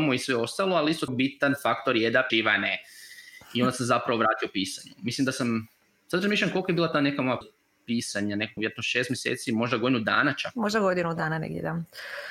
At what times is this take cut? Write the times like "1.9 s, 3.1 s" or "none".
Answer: 1.1 s, 2.3 s, 7.4 s, 8.6 s